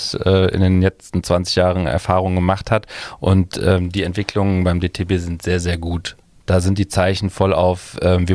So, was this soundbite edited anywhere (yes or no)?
no